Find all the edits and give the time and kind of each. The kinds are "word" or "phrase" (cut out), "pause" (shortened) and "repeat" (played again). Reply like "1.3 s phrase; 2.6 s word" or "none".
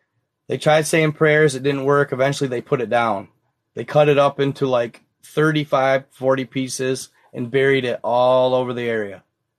none